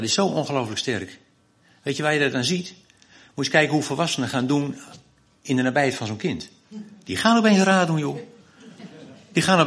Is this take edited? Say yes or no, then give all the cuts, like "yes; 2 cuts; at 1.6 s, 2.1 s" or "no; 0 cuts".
no; 0 cuts